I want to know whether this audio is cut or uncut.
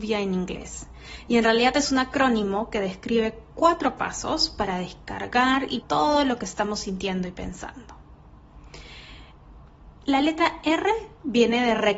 cut